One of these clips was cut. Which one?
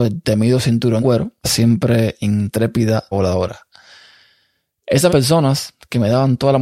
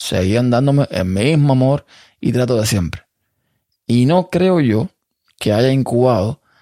first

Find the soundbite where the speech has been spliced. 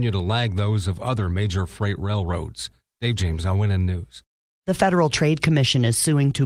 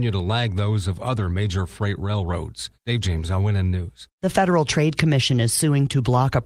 second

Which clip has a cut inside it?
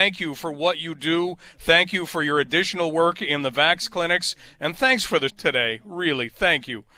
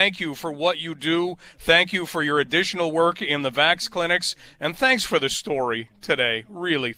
first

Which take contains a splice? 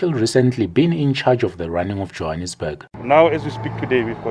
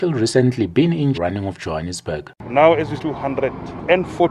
second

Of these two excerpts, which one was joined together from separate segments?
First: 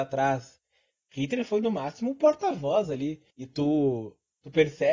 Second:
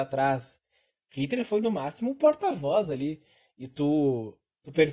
first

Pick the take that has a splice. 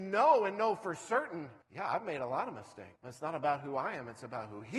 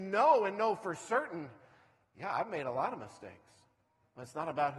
first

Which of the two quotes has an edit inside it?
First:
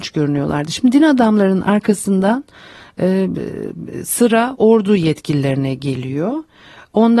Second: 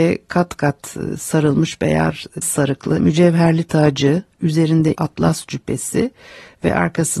second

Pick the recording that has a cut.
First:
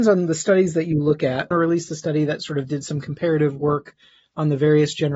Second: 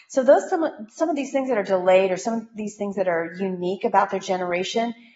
first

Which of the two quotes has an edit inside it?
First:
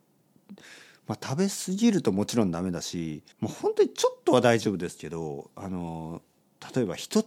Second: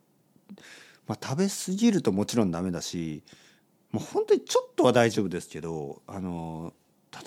first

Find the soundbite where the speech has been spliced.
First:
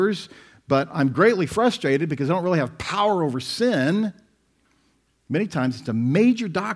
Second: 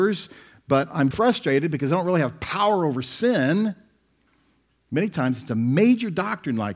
second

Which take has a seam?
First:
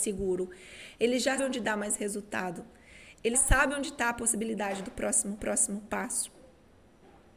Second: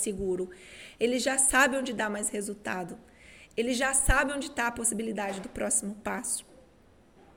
first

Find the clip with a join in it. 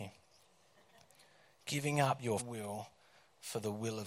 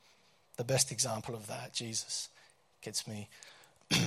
first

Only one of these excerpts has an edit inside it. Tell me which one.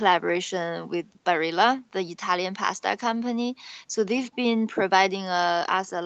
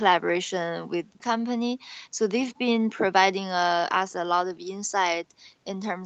second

